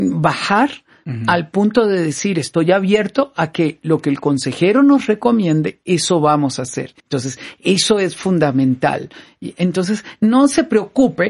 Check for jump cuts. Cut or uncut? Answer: cut